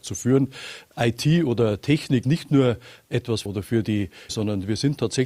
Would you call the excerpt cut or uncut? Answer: cut